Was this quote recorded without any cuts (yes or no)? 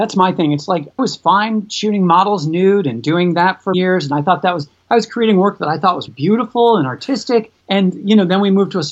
no